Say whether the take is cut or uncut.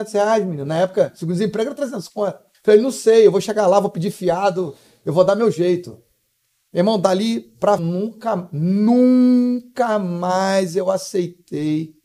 cut